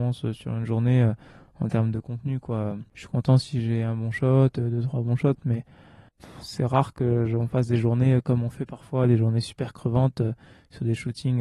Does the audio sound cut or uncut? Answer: uncut